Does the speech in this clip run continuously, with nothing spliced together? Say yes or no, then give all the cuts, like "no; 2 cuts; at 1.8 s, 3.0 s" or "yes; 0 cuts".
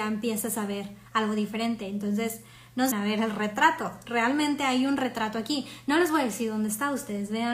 no; 2 cuts; at 1.1 s, 2.9 s